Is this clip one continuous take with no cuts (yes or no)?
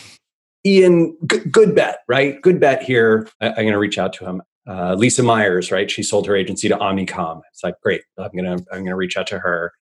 no